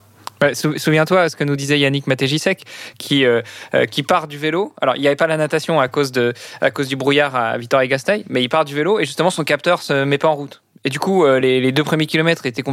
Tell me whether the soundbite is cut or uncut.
uncut